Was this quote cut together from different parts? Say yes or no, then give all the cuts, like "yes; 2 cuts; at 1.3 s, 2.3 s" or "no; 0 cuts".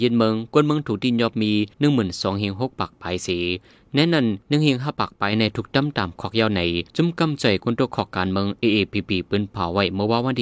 yes; 3 cuts; at 1.7 s, 4.4 s, 6.9 s